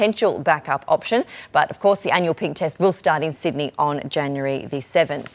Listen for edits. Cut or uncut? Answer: uncut